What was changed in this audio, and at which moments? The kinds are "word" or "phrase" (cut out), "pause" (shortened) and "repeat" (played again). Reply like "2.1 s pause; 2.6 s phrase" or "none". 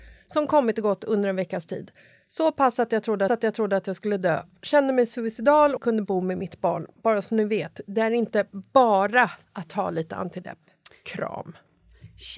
3.3 s repeat; 5.8 s phrase